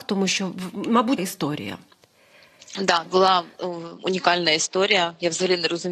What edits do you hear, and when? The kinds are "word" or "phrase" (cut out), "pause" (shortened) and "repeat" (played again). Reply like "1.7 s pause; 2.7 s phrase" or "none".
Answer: 1.2 s word; 3.1 s word; 4.0 s word